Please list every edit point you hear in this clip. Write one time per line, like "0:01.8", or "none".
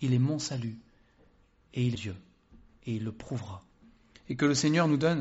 0:01.9

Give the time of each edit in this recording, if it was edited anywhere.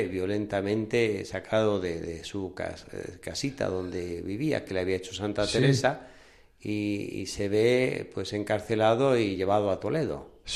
none

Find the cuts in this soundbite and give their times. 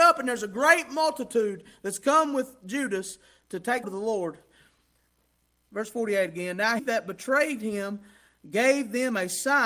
0:03.8
0:06.8

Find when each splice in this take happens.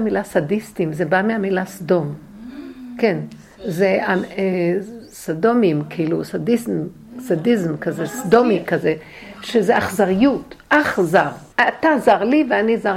0:11.5

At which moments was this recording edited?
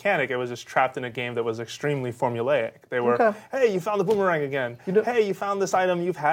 none

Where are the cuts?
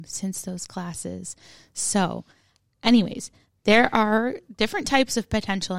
none

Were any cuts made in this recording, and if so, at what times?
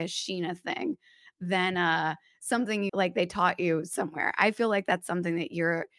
0:02.9

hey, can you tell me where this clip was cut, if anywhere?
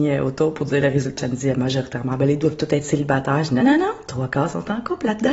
0:01.2
0:03.6

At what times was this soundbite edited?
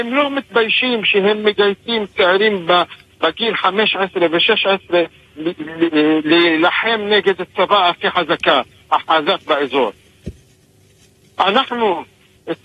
none

